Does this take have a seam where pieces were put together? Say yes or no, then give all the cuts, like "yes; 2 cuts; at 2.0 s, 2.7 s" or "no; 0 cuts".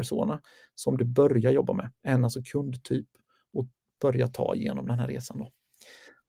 no; 0 cuts